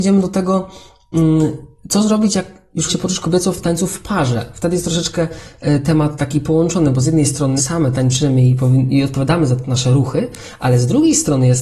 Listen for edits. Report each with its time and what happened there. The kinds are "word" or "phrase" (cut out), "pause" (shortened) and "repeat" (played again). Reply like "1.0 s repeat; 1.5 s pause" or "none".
2.9 s word; 7.6 s phrase